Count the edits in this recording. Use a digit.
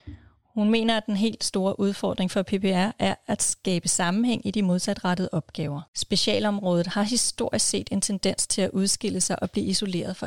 1